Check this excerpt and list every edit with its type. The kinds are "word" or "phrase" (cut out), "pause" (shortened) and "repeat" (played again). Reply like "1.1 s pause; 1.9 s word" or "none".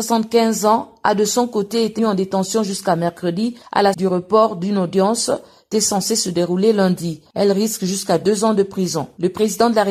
2.0 s word; 3.9 s word; 5.7 s word

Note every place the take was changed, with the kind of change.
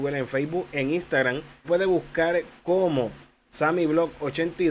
1.6 s word

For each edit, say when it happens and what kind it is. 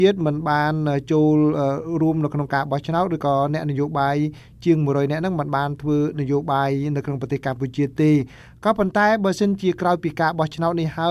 none

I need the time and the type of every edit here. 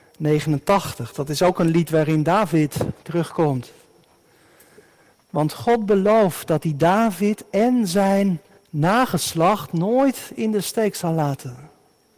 8.6 s pause

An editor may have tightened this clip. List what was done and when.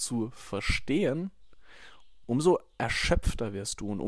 none

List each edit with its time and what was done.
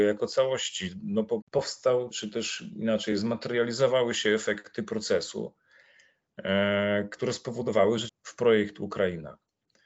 1.4 s word; 2.1 s word; 8.1 s phrase

